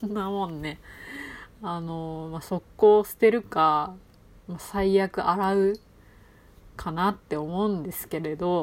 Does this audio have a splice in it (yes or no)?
no